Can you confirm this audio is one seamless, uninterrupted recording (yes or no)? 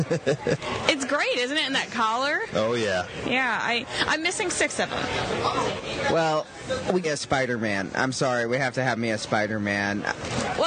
no